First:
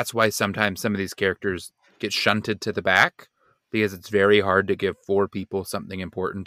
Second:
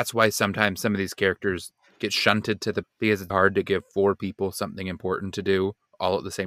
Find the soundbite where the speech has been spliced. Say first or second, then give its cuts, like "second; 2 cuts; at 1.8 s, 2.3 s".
second; 2 cuts; at 2.8 s, 3.3 s